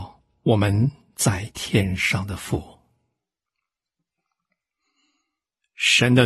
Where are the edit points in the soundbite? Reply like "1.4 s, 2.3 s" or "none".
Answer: none